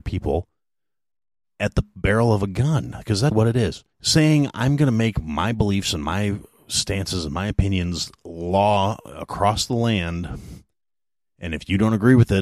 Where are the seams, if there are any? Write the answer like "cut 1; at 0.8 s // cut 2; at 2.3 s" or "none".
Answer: cut 1; at 3.3 s // cut 2; at 3.9 s